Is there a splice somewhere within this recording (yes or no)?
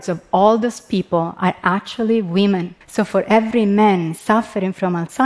yes